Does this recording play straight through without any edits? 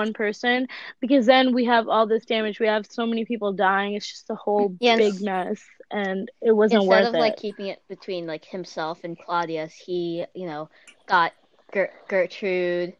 yes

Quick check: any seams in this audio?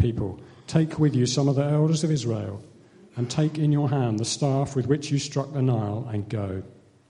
no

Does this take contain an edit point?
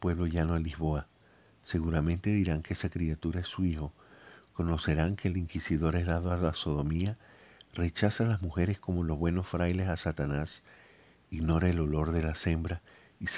no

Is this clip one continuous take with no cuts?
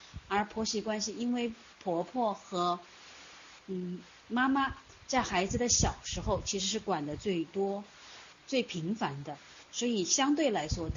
no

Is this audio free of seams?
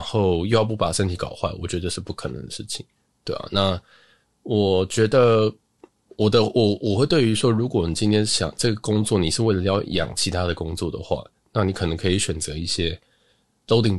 yes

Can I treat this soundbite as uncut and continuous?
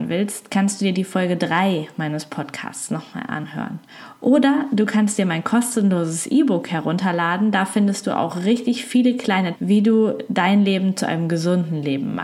no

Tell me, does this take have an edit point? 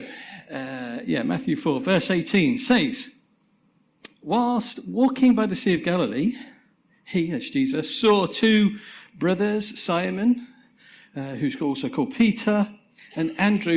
no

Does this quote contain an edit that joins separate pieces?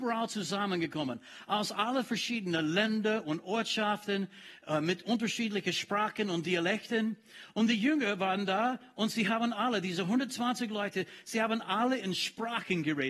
no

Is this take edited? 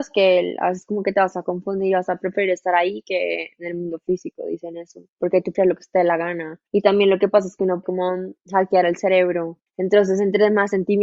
yes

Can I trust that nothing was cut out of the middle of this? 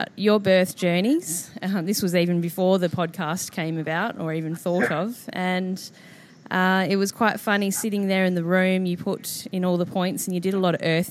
yes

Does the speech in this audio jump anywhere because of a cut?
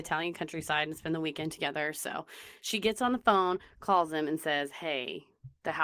no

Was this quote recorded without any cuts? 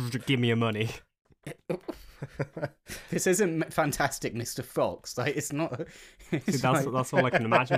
yes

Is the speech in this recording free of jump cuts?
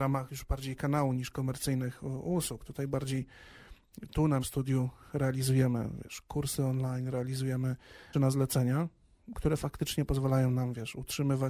no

